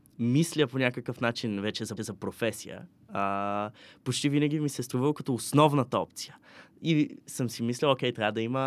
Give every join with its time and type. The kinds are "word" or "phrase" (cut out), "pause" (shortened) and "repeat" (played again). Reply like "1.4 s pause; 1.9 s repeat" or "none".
2.0 s repeat